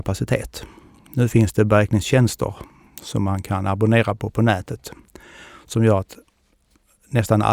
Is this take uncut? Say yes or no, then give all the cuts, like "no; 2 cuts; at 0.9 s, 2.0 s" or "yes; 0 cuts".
yes; 0 cuts